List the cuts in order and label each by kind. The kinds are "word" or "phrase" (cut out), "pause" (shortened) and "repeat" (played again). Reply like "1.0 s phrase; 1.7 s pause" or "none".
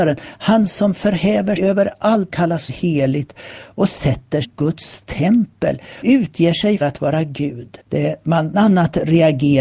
1.6 s word; 2.3 s word; 2.7 s phrase; 4.4 s word; 6.0 s word; 6.8 s word; 7.8 s pause; 8.5 s word